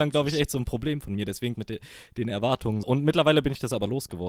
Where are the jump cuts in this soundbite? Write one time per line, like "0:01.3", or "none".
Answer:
0:01.5
0:02.8